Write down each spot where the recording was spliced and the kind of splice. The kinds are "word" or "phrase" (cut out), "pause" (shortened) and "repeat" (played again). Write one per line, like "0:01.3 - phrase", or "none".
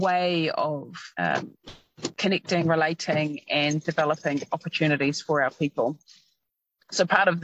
0:01.1 - pause